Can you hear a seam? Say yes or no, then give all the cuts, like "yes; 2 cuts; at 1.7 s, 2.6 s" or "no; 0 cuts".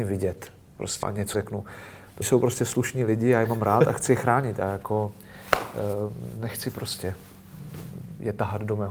yes; 3 cuts; at 1.0 s, 1.3 s, 2.2 s